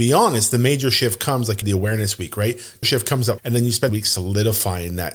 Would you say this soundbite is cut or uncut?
cut